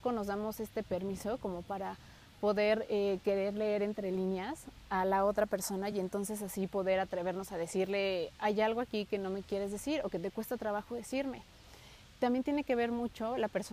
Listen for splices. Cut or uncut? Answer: uncut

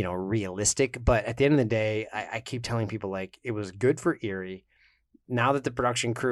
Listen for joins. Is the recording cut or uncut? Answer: uncut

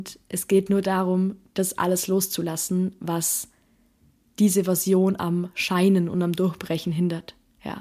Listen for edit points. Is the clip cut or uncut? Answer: uncut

